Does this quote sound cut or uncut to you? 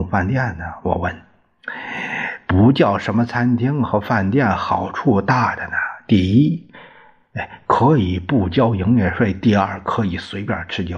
uncut